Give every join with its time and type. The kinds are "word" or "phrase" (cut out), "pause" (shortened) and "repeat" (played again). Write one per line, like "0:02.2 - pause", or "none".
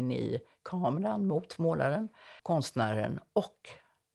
0:02.4 - pause